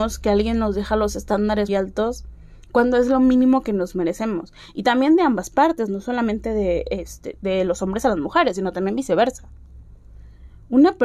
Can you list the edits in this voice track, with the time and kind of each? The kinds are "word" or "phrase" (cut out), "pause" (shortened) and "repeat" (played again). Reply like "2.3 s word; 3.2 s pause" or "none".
1.7 s word